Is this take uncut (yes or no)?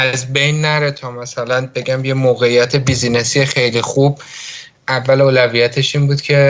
yes